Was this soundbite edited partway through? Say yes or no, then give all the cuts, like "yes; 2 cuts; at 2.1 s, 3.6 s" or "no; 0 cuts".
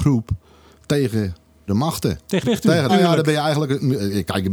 yes; 3 cuts; at 1.7 s, 2.4 s, 2.9 s